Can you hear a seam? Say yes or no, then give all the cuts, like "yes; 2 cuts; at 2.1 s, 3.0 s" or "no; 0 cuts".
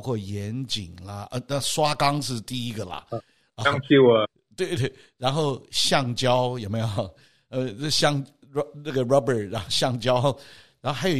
no; 0 cuts